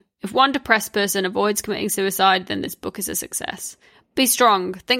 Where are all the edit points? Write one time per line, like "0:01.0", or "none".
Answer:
none